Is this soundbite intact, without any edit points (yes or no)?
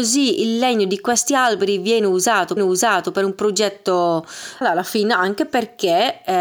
no